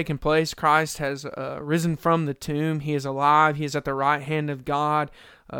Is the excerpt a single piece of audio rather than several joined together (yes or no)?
yes